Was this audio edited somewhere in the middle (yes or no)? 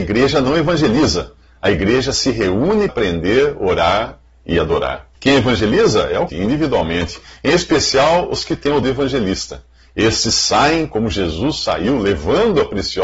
yes